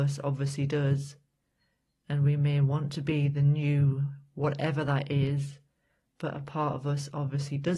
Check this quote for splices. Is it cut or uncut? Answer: uncut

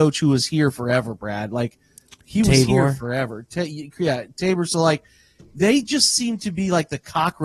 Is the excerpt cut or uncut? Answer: uncut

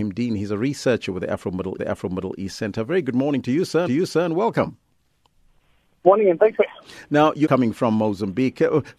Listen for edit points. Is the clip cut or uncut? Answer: cut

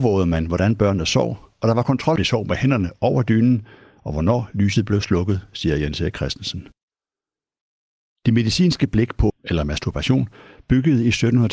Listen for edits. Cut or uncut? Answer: cut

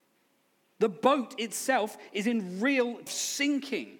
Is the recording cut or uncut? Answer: cut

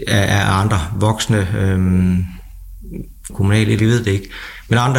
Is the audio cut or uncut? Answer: cut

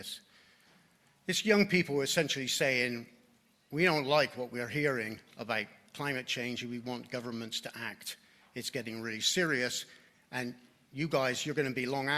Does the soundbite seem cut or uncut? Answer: uncut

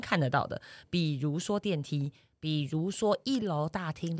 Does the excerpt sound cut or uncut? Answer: uncut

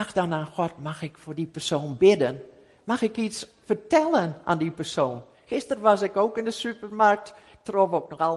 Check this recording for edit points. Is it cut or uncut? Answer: uncut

